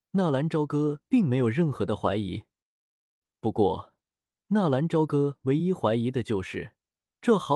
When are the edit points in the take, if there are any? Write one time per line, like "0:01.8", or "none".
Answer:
none